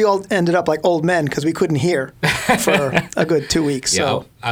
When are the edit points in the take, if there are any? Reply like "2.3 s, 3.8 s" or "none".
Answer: none